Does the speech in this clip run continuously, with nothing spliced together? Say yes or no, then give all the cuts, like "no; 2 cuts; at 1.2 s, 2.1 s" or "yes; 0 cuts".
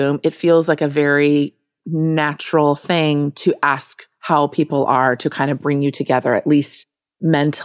yes; 0 cuts